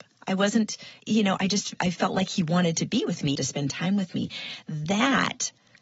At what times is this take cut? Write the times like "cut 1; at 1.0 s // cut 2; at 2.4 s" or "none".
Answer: cut 1; at 1.0 s // cut 2; at 3.4 s

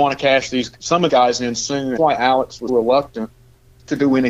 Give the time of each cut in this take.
cut 1; at 1.1 s // cut 2; at 2.0 s // cut 3; at 2.7 s

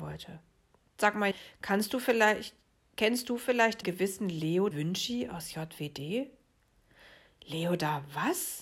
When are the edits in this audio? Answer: cut 1; at 1.3 s // cut 2; at 3.8 s // cut 3; at 4.7 s

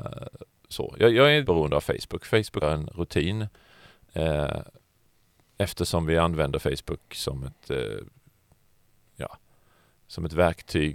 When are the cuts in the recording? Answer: cut 1; at 1.4 s // cut 2; at 2.6 s

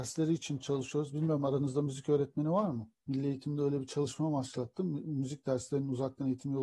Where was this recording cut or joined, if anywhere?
cut 1; at 3.0 s

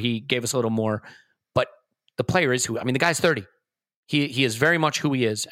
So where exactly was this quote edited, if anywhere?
none

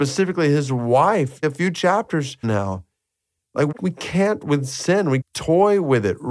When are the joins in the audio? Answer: cut 1; at 1.4 s // cut 2; at 2.4 s // cut 3; at 3.7 s // cut 4; at 4.4 s // cut 5; at 5.2 s

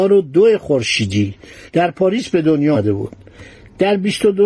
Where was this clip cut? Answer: none

